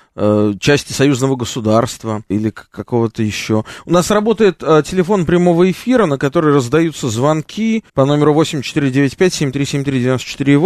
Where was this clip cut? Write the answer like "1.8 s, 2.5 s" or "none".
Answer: 2.3 s, 7.9 s